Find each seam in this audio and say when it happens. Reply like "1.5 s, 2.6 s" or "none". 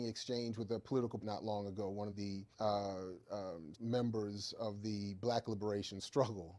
1.2 s, 2.1 s, 2.5 s, 3.7 s